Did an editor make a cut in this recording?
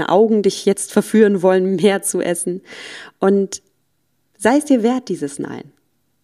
no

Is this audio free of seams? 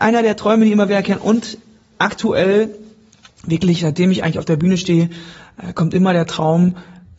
yes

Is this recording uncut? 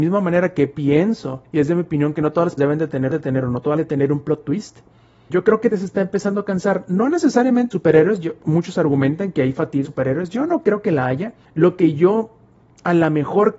no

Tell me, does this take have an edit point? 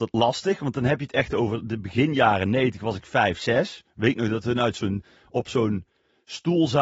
no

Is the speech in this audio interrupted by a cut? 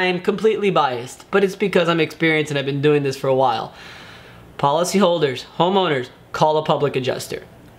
no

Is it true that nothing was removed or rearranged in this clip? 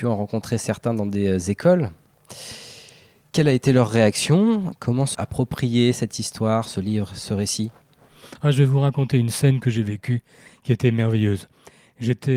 no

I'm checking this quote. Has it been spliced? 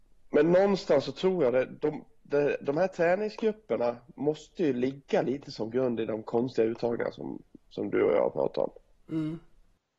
no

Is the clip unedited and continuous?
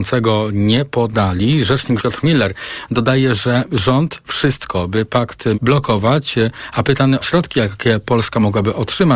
no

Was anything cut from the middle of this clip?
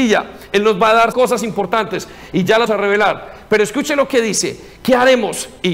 yes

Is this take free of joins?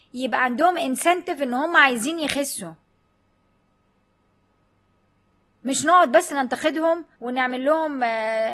no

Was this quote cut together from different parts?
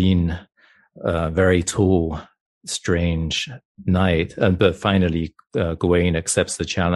no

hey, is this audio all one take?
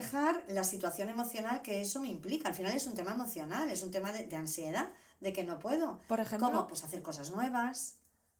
yes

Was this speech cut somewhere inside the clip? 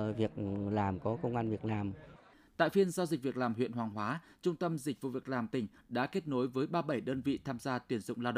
no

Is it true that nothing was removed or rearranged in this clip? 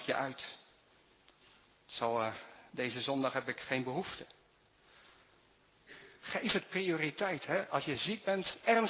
yes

